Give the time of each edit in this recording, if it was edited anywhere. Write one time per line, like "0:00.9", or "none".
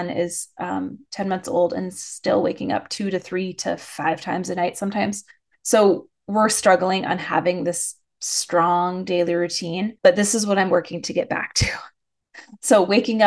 0:10.0